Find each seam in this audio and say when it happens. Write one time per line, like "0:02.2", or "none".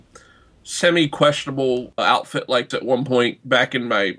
0:02.0
0:02.7